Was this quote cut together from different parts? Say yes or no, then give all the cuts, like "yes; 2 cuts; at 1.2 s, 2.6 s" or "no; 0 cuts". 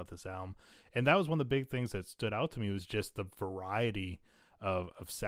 no; 0 cuts